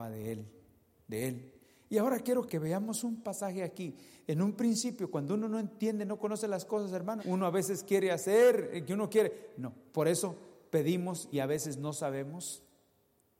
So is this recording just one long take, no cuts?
no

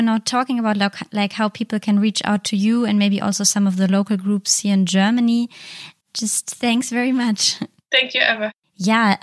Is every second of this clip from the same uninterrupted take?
yes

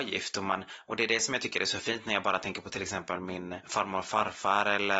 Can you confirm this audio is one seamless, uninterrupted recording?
yes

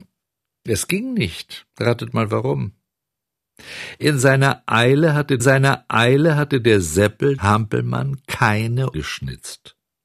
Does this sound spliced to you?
yes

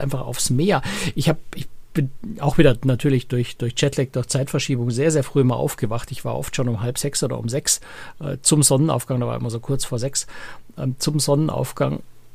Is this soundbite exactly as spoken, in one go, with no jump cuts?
yes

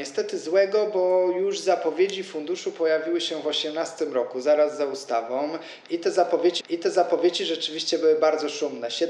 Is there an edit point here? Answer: yes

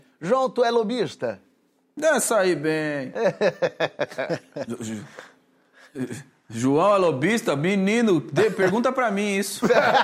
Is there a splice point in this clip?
no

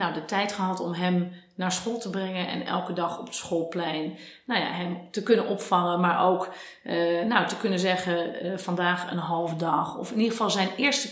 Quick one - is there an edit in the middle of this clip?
no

